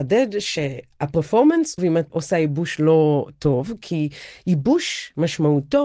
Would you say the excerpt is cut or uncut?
cut